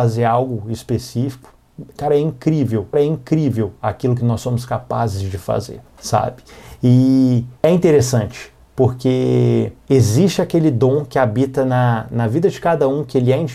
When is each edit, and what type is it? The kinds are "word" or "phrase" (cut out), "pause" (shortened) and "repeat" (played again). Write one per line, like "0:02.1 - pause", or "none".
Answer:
0:02.9 - repeat
0:05.9 - pause
0:07.6 - pause
0:09.8 - pause